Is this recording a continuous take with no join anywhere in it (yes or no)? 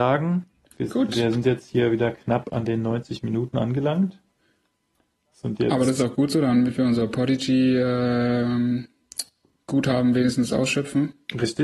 yes